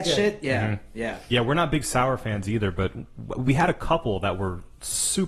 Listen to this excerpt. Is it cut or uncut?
uncut